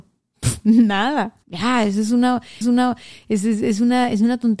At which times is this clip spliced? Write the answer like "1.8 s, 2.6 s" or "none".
1.4 s, 2.6 s